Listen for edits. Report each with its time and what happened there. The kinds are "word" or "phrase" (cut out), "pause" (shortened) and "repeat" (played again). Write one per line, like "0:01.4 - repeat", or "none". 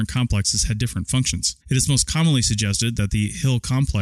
0:01.6 - pause